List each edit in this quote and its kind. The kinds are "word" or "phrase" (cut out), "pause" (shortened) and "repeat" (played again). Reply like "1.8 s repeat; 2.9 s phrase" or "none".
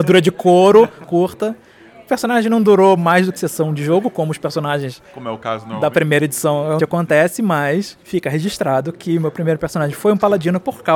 1.0 s phrase; 3.4 s word; 5.0 s pause; 6.8 s word; 8.0 s pause